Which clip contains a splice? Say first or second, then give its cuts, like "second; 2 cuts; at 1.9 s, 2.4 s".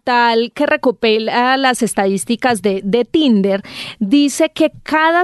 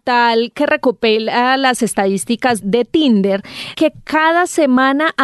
second; 2 cuts; at 2.6 s, 3.7 s